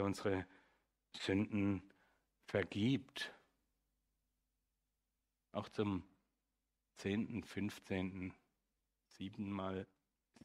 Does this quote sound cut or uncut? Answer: uncut